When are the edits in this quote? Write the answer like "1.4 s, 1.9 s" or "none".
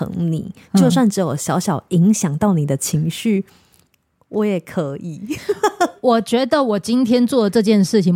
none